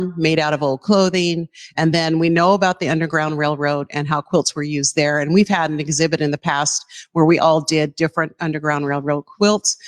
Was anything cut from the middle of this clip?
no; 0 cuts

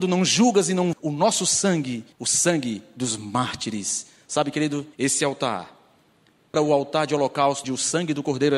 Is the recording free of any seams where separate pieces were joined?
no; 5 cuts; at 0.9 s, 2.1 s, 4.9 s, 6.5 s, 7.6 s

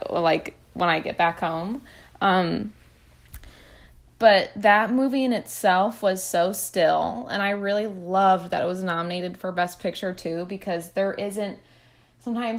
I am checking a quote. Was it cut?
no; 0 cuts

